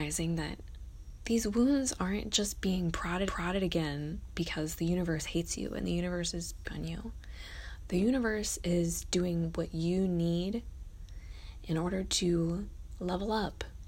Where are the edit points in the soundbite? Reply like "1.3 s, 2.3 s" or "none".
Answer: 3.3 s, 6.6 s